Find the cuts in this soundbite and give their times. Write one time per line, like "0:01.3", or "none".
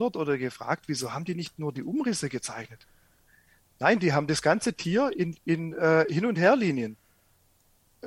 none

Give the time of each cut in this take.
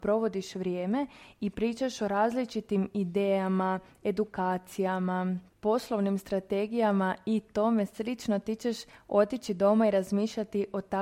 none

